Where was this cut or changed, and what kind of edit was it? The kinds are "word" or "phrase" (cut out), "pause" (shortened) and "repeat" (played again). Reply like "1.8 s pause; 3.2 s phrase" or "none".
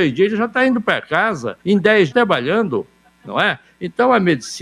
1.6 s pause; 2.1 s phrase